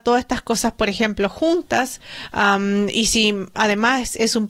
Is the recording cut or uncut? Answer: uncut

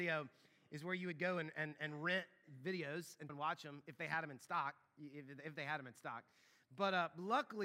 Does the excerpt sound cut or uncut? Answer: cut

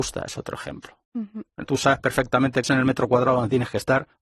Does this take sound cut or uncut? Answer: cut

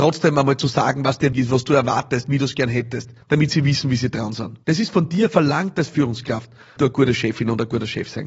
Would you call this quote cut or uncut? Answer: cut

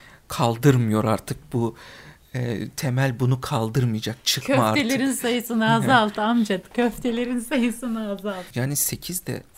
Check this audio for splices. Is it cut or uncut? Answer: uncut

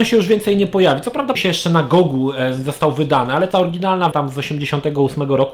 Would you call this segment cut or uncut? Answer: cut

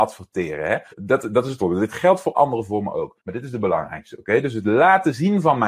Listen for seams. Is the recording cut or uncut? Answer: cut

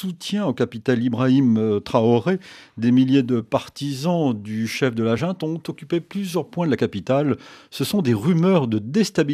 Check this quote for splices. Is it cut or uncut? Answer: uncut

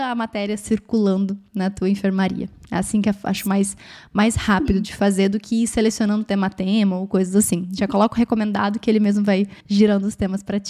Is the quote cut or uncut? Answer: cut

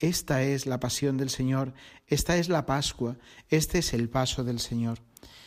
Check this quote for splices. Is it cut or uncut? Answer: uncut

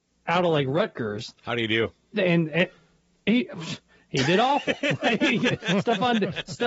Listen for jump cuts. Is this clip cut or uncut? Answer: uncut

